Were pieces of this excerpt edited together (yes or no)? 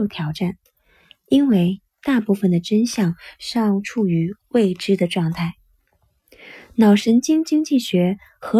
no